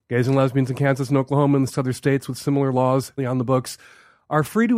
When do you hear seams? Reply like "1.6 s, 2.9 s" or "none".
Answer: 1.7 s, 3.2 s